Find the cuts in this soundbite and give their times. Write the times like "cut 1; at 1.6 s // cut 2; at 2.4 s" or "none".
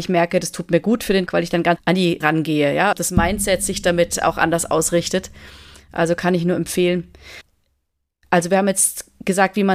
cut 1; at 1.3 s // cut 2; at 1.8 s // cut 3; at 2.2 s // cut 4; at 2.9 s